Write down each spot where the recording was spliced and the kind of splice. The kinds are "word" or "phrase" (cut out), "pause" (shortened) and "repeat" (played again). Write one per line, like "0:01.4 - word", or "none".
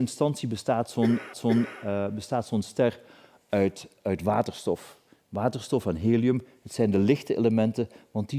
0:01.3 - repeat